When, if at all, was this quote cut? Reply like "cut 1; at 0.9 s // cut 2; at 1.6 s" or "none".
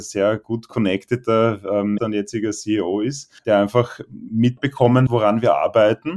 cut 1; at 2.0 s // cut 2; at 3.4 s // cut 3; at 5.1 s